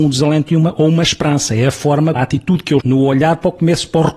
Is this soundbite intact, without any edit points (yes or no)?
no